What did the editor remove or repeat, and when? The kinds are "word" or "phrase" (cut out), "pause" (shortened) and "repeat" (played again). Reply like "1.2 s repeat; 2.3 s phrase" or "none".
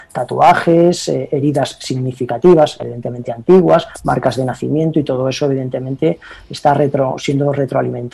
none